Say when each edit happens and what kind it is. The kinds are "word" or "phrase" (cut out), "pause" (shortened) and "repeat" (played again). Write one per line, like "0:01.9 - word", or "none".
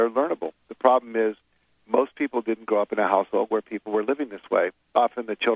none